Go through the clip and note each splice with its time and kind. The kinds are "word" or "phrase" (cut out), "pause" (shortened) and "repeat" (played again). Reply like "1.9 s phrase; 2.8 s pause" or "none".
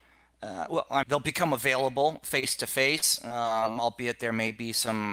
1.0 s word